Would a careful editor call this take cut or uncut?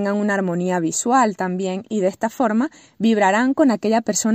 uncut